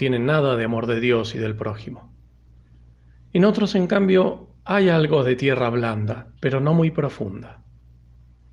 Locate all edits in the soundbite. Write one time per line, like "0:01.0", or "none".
0:04.6
0:06.4